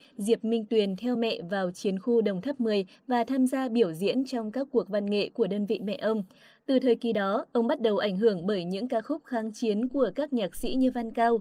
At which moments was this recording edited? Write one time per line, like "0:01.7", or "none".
none